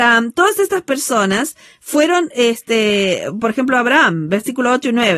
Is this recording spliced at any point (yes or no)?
no